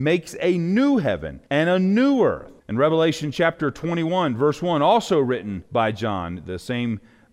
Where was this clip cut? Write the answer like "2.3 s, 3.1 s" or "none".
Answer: 1.5 s, 2.6 s, 5.7 s